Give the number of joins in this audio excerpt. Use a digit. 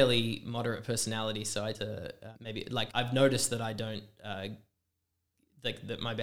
3